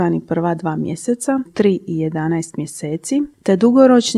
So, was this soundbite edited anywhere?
yes; 1 cut; at 1.5 s

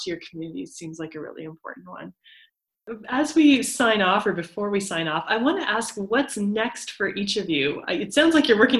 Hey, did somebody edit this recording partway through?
no; 0 cuts

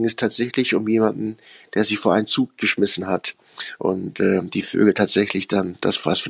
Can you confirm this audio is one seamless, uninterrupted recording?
yes; 0 cuts

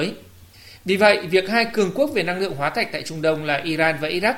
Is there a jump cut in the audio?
no; 0 cuts

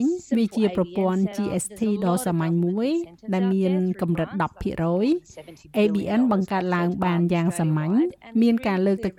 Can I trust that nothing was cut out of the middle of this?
yes; 0 cuts

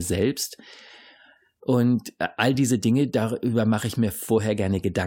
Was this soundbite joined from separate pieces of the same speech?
no; 0 cuts

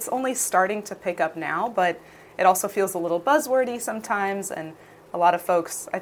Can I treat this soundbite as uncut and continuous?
yes; 0 cuts

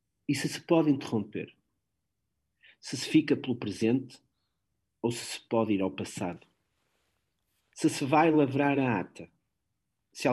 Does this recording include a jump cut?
no; 0 cuts

